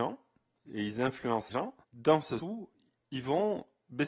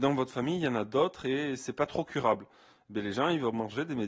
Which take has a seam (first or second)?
first